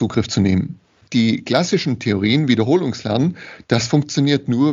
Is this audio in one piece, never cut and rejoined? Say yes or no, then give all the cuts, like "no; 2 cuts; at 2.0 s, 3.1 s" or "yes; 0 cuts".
yes; 0 cuts